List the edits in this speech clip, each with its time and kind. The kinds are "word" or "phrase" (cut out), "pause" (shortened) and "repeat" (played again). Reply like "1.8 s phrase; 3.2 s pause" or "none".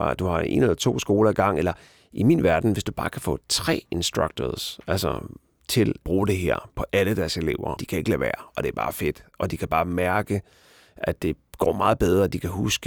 6.0 s word; 7.8 s word